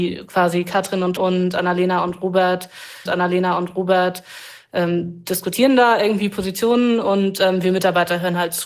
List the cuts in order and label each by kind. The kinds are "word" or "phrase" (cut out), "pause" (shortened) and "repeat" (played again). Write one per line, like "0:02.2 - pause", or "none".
0:01.2 - word
0:03.1 - repeat